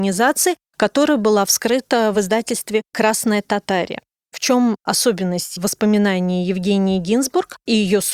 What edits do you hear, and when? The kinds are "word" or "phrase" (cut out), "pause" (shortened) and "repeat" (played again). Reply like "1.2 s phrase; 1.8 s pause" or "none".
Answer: none